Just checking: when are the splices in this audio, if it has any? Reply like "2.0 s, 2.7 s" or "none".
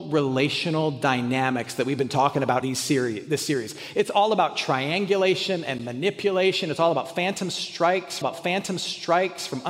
2.6 s, 8.2 s